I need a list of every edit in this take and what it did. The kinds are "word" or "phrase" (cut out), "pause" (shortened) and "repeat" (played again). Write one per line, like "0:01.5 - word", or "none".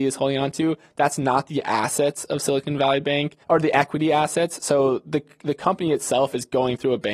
0:03.4 - pause